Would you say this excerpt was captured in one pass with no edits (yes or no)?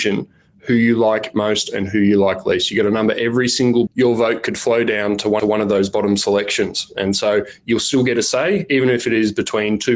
no